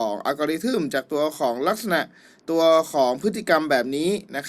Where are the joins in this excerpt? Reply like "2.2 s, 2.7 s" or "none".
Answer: none